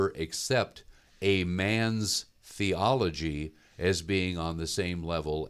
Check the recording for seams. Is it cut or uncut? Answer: uncut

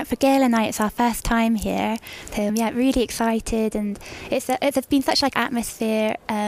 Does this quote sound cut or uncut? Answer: cut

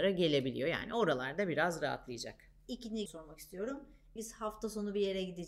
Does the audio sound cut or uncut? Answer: cut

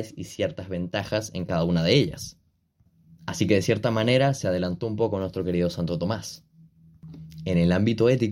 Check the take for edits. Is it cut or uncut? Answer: uncut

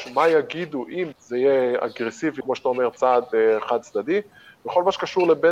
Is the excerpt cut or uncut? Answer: cut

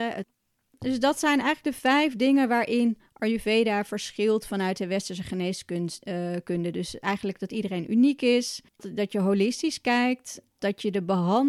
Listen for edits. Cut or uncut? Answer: cut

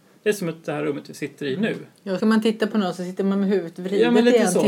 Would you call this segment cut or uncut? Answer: cut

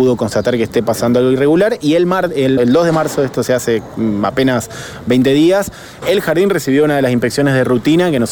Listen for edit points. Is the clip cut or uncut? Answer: cut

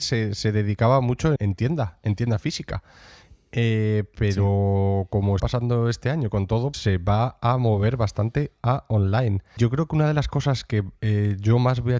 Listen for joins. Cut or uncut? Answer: cut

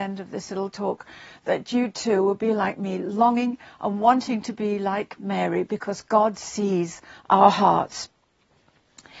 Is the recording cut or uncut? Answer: uncut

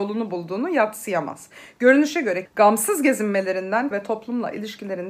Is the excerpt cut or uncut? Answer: cut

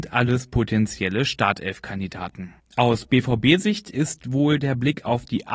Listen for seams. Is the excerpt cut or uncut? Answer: uncut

